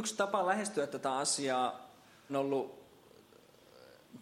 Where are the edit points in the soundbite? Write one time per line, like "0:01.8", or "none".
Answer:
0:02.3